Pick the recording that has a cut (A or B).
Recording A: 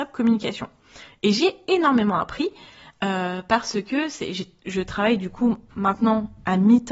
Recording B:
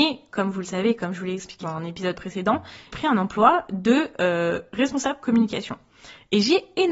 B